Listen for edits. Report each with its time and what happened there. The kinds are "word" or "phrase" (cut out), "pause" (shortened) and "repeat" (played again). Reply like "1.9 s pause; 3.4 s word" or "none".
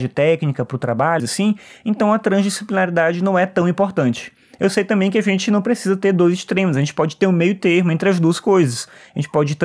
1.2 s phrase